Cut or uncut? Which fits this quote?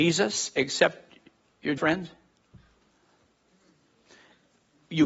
cut